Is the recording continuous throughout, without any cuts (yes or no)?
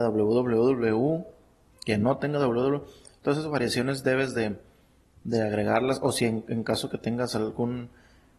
yes